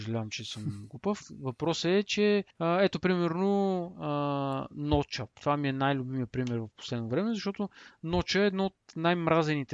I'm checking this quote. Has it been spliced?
yes; 2 cuts; at 2.5 s, 5.3 s

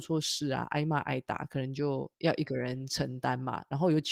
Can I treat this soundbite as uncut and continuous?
no; 1 cut; at 2.1 s

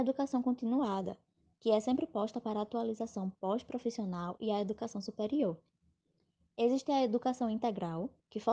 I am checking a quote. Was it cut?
no; 0 cuts

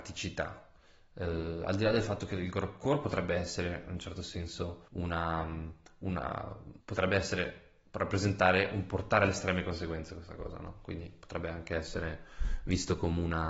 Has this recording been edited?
yes; 2 cuts; at 4.9 s, 6.8 s

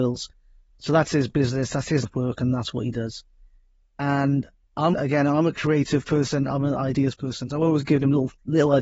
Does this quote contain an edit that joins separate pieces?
yes; 2 cuts; at 2.0 s, 4.9 s

